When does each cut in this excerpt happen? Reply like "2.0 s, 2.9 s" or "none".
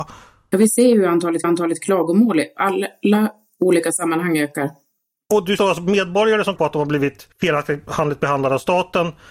1.4 s, 5.6 s, 6.6 s, 7.3 s